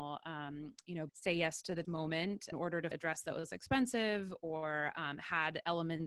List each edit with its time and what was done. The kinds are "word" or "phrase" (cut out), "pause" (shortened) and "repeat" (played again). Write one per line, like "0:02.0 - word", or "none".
0:01.1 - word
0:01.8 - word
0:02.5 - word
0:02.9 - word
0:03.5 - word